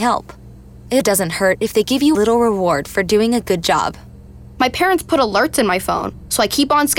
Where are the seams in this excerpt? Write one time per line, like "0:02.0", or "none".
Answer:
0:01.0
0:02.1

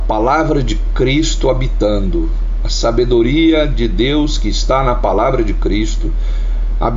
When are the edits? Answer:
none

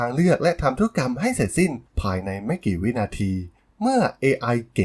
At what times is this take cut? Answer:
none

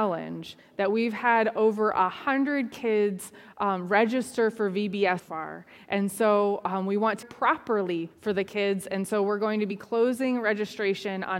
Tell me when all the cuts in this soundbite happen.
0:05.2
0:07.2
0:08.1

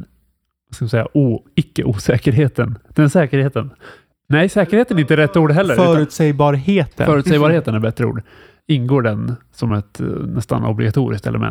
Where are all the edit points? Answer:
none

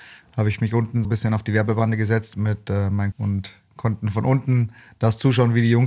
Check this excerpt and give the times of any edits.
0:01.0
0:02.3
0:03.1

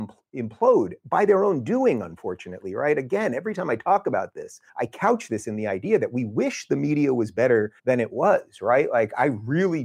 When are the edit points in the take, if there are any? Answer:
0:04.7
0:07.8

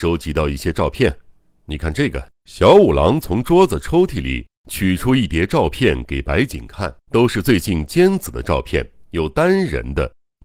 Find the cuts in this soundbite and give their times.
0:02.4
0:07.0
0:09.1

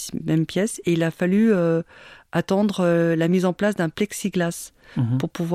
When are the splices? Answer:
none

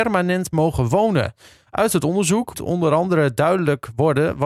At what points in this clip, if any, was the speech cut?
0:02.5

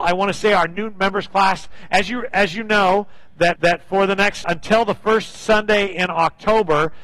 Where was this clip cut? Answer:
0:03.6
0:04.4

